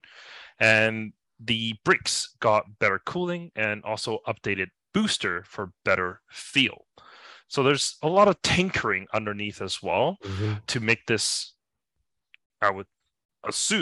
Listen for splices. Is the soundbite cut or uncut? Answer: uncut